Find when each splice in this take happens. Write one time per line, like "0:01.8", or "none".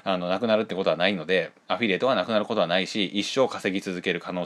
0:01.6